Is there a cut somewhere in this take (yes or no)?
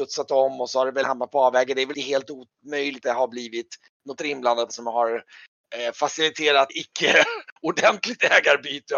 yes